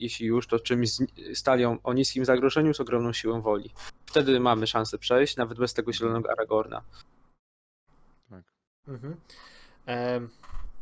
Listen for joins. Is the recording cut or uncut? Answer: uncut